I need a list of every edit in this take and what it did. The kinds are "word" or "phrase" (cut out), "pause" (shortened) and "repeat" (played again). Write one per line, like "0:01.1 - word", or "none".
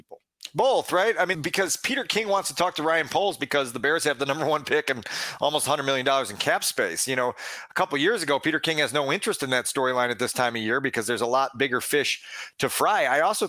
0:01.3 - word